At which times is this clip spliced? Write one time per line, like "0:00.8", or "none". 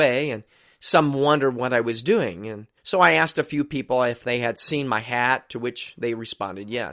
0:02.8

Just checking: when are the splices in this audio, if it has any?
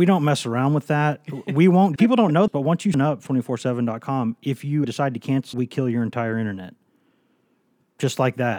0:02.0
0:02.5
0:02.9
0:03.3
0:04.8
0:05.5

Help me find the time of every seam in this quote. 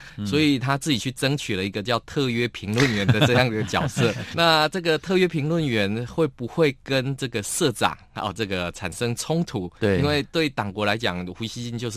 0:04.3

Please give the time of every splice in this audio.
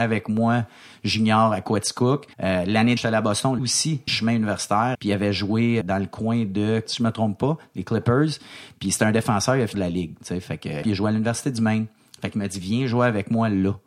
0:02.3
0:03.0
0:03.6
0:04.1
0:04.9
0:05.8
0:06.8
0:09.7
0:10.8

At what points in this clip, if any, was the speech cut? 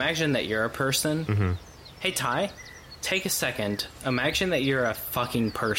none

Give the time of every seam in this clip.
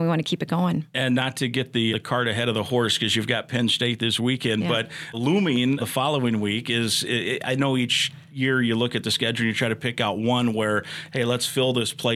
0:01.9
0:05.1
0:05.8

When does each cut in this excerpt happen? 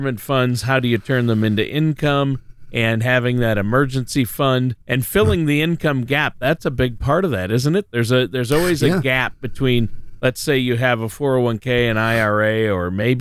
0:04.8

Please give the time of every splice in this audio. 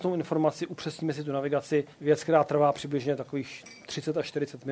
0:01.9

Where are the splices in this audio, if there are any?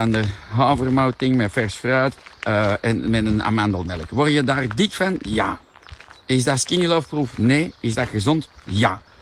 0:02.3

